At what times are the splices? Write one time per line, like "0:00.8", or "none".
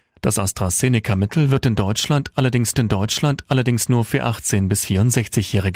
0:02.7